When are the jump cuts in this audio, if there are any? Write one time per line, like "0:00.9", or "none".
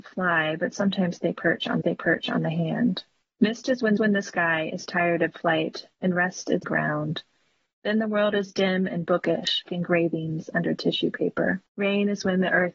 0:01.8
0:03.2
0:04.0
0:05.9
0:06.6
0:09.7
0:11.7